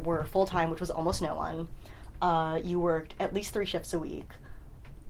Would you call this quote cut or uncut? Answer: uncut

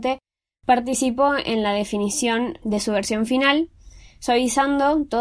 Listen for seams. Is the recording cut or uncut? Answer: uncut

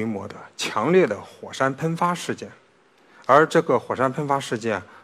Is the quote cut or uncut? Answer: uncut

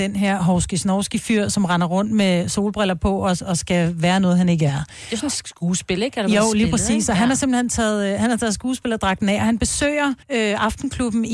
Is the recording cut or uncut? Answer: cut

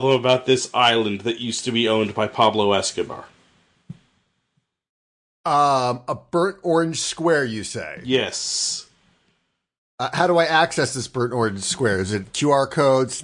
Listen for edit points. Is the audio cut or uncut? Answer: uncut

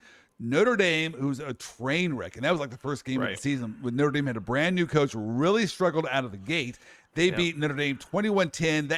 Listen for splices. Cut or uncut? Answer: uncut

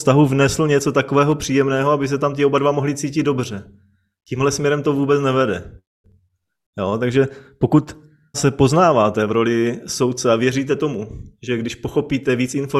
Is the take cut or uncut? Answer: cut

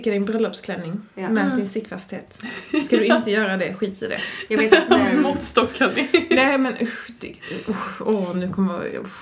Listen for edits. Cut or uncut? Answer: uncut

